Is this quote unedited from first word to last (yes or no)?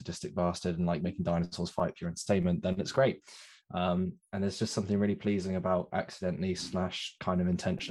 yes